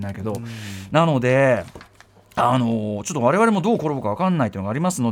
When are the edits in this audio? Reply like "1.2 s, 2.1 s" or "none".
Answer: none